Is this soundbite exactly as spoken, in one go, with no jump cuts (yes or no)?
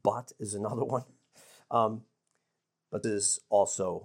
no